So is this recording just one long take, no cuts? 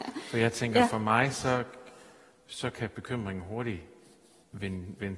yes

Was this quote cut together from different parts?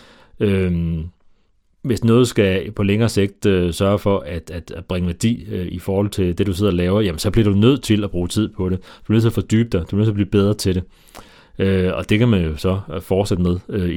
no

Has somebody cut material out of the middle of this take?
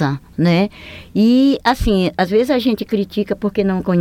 no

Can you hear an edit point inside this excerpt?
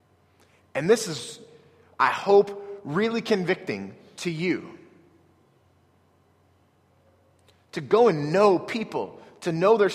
no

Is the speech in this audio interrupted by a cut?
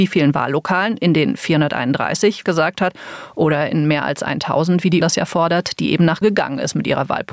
yes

